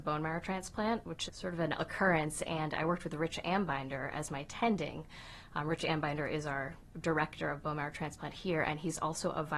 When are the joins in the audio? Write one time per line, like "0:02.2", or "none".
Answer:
0:01.3
0:01.8